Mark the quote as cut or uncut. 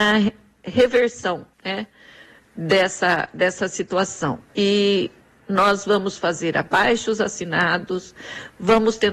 cut